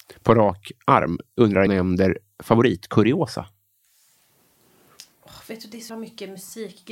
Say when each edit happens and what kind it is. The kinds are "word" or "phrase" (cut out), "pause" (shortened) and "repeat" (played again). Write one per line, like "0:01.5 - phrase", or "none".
0:01.7 - word
0:05.9 - word